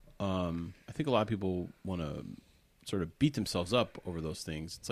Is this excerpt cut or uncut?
cut